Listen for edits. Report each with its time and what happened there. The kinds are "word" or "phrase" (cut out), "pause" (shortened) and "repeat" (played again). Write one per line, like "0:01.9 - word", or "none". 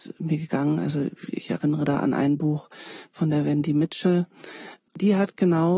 none